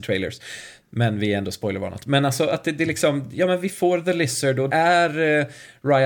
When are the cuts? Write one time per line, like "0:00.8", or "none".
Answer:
0:04.7

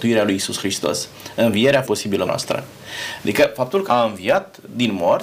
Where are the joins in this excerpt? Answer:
0:01.8
0:02.3
0:03.9

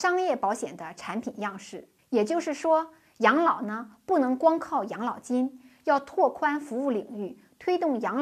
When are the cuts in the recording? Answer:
none

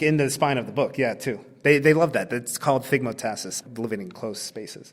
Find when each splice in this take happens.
none

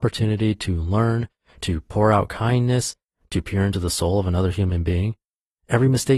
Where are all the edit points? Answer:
none

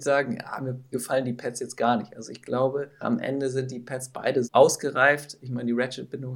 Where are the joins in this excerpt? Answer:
0:00.9
0:03.0
0:04.4

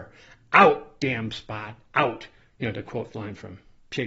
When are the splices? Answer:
0:03.1

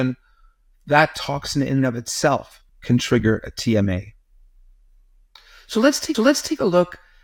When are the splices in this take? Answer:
0:02.7
0:06.1

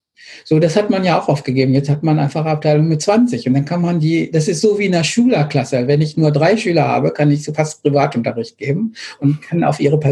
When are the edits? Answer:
none

